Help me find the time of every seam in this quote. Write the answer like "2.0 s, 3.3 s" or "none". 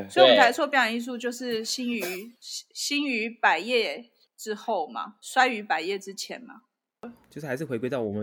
2.4 s, 4.3 s